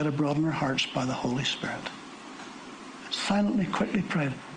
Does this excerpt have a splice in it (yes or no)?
yes